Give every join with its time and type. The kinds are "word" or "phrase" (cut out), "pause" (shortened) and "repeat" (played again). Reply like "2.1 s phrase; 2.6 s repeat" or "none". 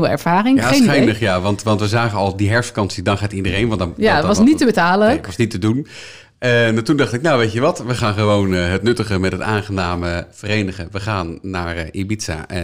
none